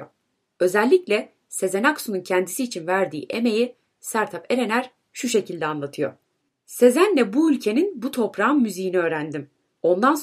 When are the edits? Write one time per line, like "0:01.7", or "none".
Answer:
none